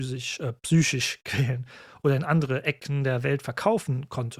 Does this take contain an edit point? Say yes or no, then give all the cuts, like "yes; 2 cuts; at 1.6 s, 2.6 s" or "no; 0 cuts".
no; 0 cuts